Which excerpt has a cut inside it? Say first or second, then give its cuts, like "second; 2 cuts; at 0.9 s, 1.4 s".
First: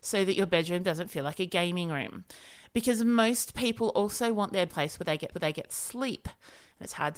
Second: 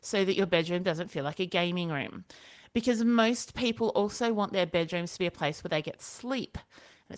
first; 2 cuts; at 4.7 s, 5.3 s